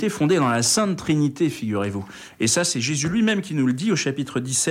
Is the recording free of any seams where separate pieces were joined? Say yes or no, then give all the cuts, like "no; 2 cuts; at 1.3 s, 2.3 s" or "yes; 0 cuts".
yes; 0 cuts